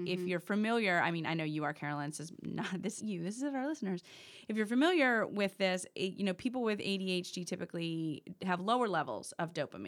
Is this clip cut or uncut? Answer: cut